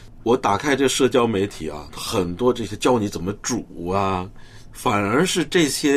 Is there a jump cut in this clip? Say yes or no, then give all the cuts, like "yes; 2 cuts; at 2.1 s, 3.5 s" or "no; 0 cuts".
yes; 1 cut; at 4.7 s